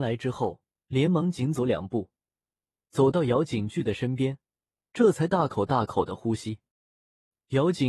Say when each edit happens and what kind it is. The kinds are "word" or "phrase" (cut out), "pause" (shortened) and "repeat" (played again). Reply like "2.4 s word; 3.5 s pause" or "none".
none